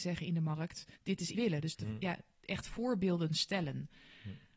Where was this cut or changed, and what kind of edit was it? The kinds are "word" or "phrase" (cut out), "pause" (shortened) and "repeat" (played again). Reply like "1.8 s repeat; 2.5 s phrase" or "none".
0.9 s pause; 1.3 s phrase